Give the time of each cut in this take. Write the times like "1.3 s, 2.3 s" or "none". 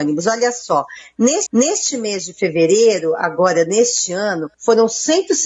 1.5 s, 4.5 s